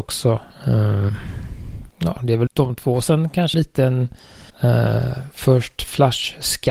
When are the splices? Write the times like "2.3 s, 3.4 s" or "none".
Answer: 1.9 s, 2.5 s, 3.5 s, 4.5 s